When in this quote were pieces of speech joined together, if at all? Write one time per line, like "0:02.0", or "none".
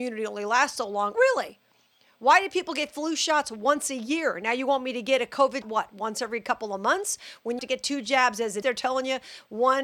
0:01.1
0:05.6
0:07.6
0:08.6

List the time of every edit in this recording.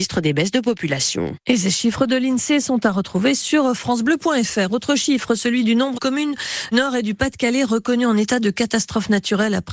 0:05.9
0:06.7

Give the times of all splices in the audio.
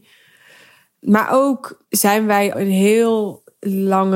0:01.9
0:02.5

